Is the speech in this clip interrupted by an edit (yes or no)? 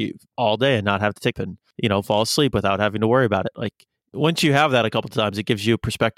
yes